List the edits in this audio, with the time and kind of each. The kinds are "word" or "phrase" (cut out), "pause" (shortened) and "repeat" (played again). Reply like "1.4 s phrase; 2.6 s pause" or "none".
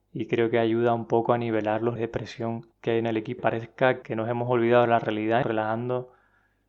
2.0 s word; 2.7 s pause; 3.4 s phrase; 4.0 s word; 5.4 s phrase